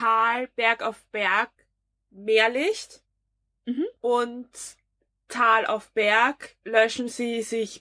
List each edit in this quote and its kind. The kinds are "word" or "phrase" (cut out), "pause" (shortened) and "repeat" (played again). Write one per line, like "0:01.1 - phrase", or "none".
none